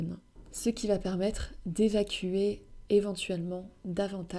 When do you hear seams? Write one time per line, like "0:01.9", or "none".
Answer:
none